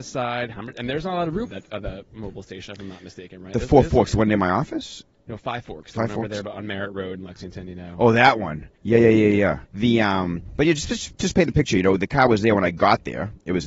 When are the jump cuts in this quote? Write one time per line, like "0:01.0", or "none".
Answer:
0:01.5
0:08.8
0:09.6